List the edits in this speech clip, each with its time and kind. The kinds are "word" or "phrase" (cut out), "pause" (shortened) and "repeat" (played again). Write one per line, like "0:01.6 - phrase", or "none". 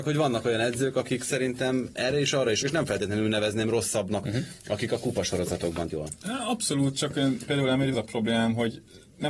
0:02.6 - word
0:04.2 - word
0:05.9 - word
0:07.5 - word
0:07.9 - word